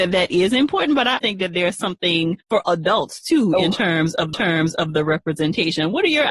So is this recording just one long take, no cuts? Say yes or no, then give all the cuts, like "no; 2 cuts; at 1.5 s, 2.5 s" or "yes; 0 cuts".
no; 3 cuts; at 1.2 s, 2.4 s, 4.3 s